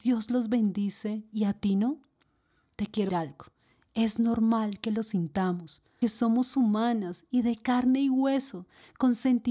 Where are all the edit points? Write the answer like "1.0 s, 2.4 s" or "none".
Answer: 3.1 s, 6.0 s